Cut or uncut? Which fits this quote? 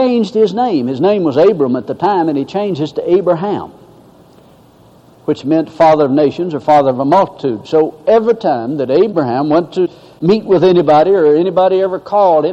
uncut